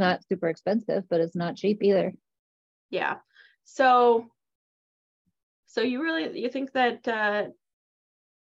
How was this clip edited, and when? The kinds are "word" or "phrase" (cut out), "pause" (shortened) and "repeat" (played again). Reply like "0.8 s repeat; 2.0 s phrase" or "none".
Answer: none